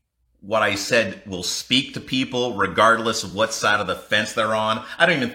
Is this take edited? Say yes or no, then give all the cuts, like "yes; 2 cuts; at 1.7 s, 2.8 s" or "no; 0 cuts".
no; 0 cuts